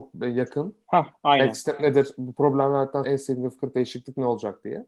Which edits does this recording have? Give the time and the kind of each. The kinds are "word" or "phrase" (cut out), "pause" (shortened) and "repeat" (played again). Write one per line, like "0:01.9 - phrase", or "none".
0:03.0 - word